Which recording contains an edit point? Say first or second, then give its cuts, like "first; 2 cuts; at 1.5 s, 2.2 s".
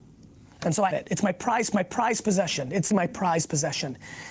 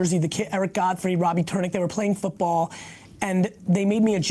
first; 3 cuts; at 0.9 s, 1.7 s, 2.9 s